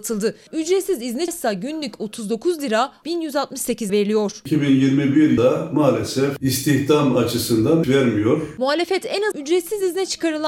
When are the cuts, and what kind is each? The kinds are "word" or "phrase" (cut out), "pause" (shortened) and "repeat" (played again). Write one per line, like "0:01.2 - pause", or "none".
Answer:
0:01.3 - word
0:03.0 - word
0:03.9 - word
0:05.4 - word
0:07.8 - word
0:09.3 - word